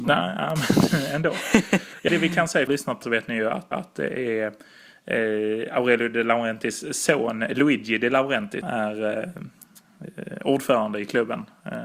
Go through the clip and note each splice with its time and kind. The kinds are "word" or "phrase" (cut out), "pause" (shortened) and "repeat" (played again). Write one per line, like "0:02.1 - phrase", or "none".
0:02.1 - word
0:02.7 - phrase
0:03.0 - phrase
0:03.7 - repeat
0:08.6 - word